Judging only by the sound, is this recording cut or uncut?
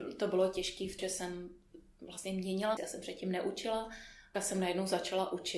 cut